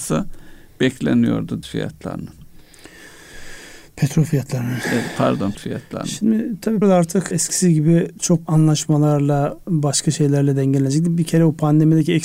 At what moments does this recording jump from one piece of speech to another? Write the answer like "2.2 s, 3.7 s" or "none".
1.6 s, 5.5 s, 6.8 s, 7.3 s, 8.5 s

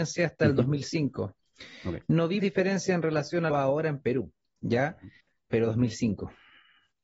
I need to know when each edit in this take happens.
2.4 s, 3.5 s, 5.2 s

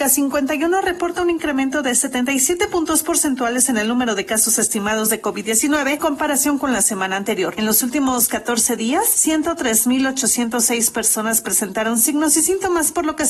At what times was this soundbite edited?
6.0 s

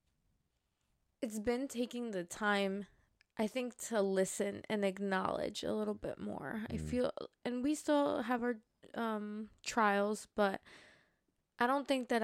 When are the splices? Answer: none

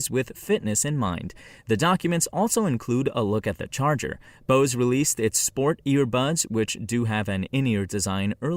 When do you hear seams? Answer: none

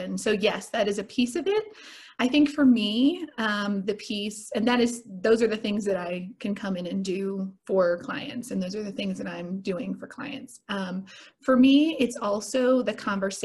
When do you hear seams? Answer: 7.6 s

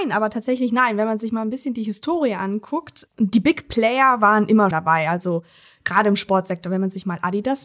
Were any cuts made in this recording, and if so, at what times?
3.1 s, 4.7 s

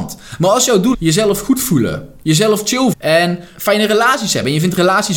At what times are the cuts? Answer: 0.9 s, 2.9 s, 3.5 s

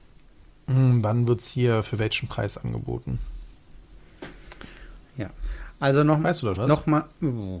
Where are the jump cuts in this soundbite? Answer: 6.6 s

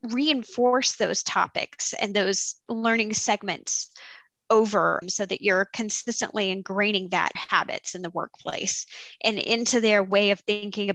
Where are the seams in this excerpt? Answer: 5.0 s, 7.4 s

